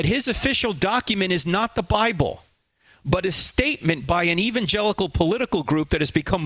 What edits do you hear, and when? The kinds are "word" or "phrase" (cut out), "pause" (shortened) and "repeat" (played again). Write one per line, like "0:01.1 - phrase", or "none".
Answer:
none